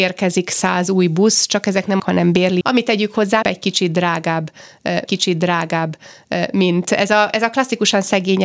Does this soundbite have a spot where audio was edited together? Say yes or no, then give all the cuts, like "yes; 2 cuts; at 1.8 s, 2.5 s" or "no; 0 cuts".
yes; 4 cuts; at 2.0 s, 2.6 s, 3.4 s, 5.1 s